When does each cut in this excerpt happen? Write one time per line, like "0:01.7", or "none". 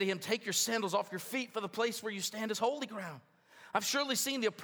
none

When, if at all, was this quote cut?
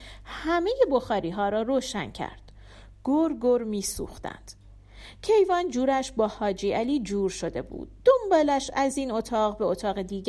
none

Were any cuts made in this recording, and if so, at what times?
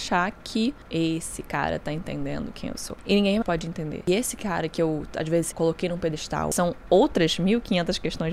0:03.4
0:05.5

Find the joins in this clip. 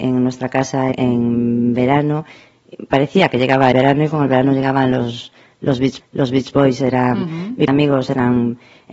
0:00.9
0:03.7
0:06.0
0:07.7

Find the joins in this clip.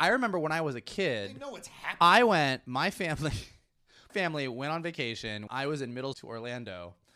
0:04.1
0:05.5
0:06.1

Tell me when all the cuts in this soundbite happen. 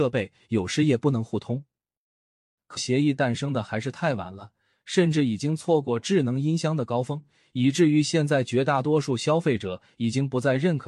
0:02.8

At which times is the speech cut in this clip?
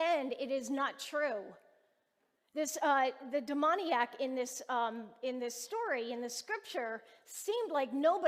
none

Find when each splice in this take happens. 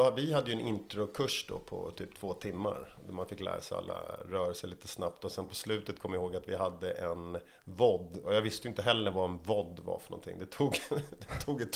none

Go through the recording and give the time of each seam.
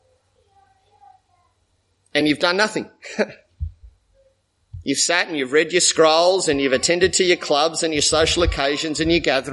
none

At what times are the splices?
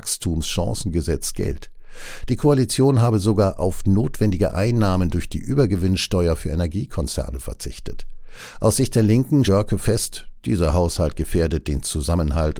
0:09.4

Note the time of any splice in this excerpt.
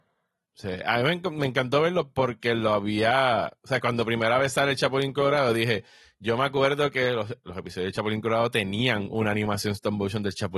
none

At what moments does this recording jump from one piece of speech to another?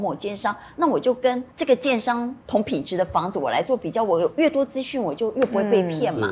0:01.5
0:02.4

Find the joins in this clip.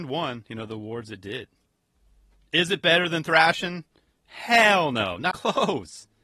0:05.3

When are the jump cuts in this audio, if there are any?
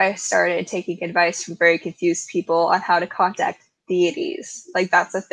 none

